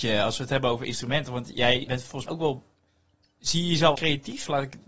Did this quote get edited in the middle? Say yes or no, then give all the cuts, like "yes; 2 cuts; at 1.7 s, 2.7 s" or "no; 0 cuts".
yes; 3 cuts; at 1.9 s, 2.3 s, 4.0 s